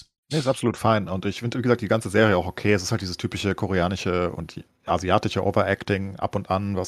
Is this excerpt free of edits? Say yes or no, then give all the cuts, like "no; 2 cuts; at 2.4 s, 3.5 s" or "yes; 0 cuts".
yes; 0 cuts